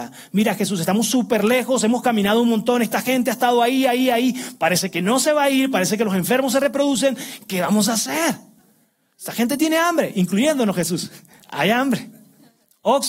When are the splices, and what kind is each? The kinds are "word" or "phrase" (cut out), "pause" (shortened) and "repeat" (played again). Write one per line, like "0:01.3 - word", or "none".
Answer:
none

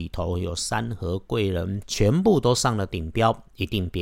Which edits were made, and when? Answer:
0:01.8 - phrase

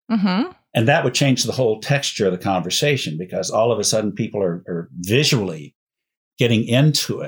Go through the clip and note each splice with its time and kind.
none

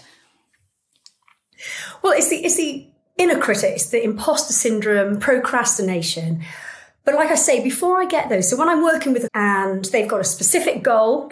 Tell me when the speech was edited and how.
0:09.3 - word

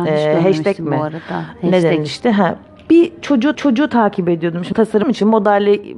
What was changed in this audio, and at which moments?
0:03.5 - repeat
0:04.7 - word
0:05.0 - word

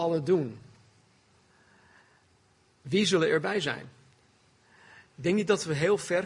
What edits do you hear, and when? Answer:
none

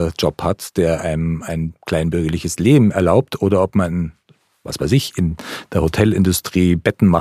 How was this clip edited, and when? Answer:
none

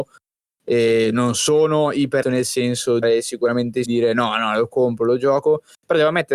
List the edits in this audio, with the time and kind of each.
0:02.2 - word
0:03.0 - phrase
0:03.8 - word

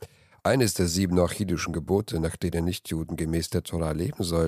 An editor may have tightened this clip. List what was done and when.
none

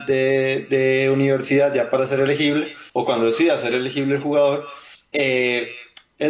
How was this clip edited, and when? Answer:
0:02.9 - pause
0:04.9 - pause

